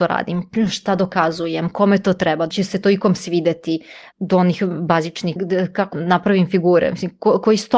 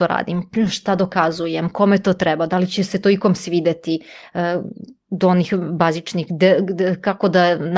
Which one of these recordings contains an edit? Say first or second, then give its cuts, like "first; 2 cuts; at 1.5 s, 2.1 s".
first; 4 cuts; at 2.5 s, 4.1 s, 5.4 s, 5.9 s